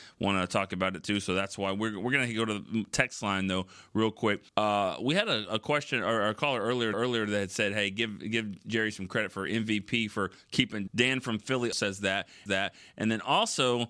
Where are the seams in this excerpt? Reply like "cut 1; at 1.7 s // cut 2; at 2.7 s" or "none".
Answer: cut 1; at 4.5 s // cut 2; at 6.9 s // cut 3; at 10.9 s // cut 4; at 11.7 s // cut 5; at 12.5 s

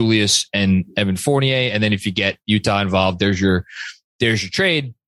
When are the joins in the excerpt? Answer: none

